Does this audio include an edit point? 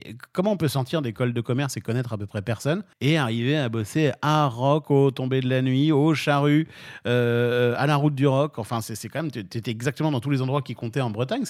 yes; 1 cut; at 2.9 s

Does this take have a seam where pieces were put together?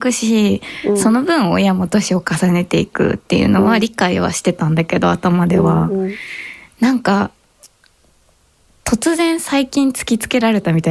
no; 0 cuts

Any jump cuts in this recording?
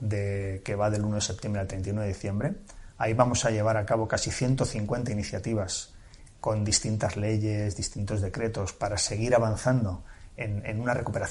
no; 0 cuts

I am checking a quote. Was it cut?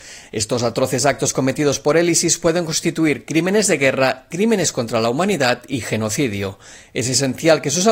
no; 0 cuts

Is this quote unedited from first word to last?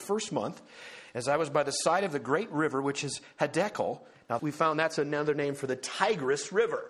no; 1 cut; at 4.4 s

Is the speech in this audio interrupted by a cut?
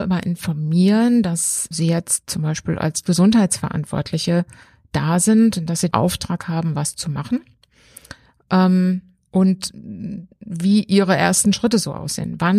yes; 2 cuts; at 1.7 s, 5.9 s

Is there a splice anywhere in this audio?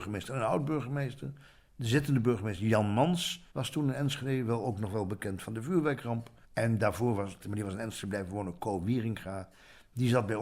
yes; 3 cuts; at 3.5 s, 6.4 s, 7.4 s

